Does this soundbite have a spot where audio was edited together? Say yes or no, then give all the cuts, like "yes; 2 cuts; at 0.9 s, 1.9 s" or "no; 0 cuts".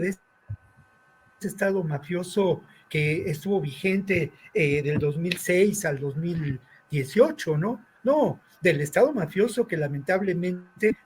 no; 0 cuts